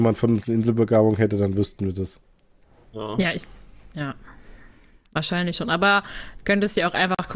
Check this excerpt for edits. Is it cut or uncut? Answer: uncut